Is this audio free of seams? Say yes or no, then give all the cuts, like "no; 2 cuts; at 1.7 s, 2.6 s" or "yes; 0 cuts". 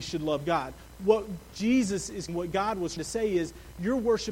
no; 2 cuts; at 2.3 s, 3.0 s